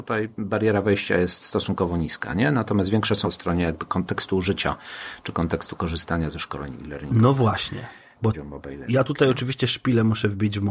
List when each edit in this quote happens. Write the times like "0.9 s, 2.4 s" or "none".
3.2 s, 8.3 s